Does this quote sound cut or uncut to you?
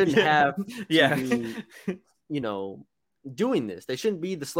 uncut